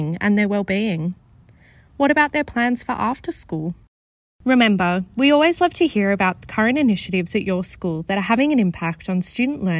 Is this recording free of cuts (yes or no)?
yes